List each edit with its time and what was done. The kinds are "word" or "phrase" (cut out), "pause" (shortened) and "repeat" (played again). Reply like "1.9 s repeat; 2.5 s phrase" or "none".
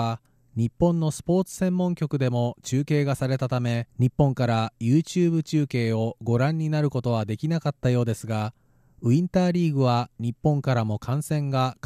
3.9 s pause